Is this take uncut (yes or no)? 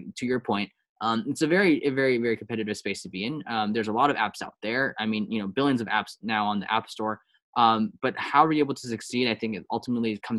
yes